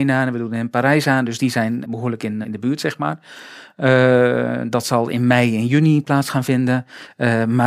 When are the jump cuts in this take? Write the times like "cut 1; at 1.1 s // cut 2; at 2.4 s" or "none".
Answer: cut 1; at 1.8 s // cut 2; at 2.4 s